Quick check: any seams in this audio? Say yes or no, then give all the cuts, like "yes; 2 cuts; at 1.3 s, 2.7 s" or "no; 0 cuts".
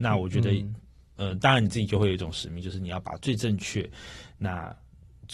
no; 0 cuts